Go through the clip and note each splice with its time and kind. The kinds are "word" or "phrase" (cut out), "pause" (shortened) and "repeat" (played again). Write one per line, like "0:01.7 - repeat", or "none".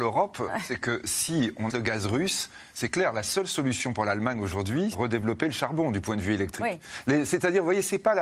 0:01.7 - word
0:04.9 - word